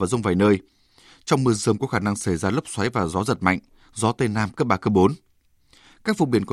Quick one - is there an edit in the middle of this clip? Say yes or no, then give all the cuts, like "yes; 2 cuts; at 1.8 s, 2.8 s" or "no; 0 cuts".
no; 0 cuts